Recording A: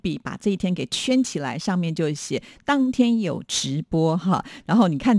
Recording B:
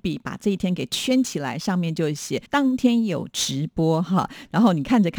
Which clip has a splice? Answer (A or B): B